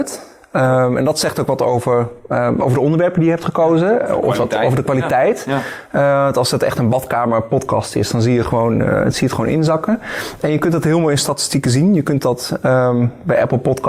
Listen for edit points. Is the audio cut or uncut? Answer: uncut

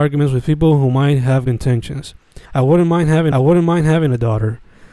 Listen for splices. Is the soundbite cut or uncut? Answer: cut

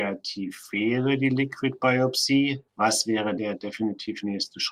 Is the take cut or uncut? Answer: cut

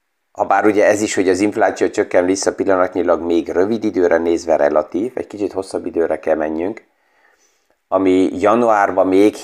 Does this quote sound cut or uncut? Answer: uncut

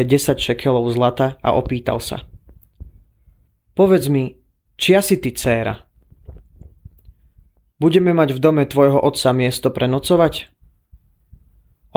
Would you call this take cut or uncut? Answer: uncut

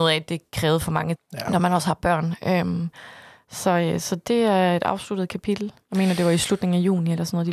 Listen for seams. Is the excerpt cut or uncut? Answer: cut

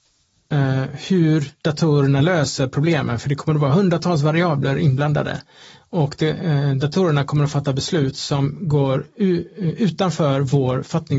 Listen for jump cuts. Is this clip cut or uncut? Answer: uncut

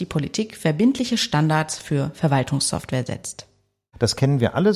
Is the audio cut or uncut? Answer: uncut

